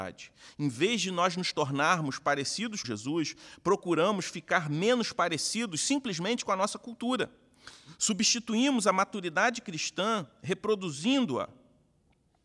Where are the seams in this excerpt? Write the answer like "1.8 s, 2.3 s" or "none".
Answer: 2.8 s